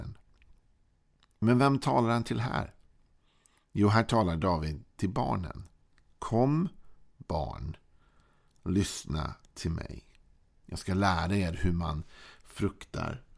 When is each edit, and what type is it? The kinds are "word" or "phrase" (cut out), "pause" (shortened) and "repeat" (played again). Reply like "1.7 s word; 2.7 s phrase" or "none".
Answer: none